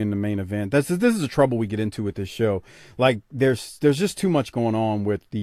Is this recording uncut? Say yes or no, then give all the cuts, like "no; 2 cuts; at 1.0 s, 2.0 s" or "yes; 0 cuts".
yes; 0 cuts